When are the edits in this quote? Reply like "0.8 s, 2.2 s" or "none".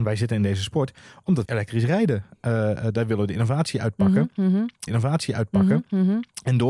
1.4 s, 4.9 s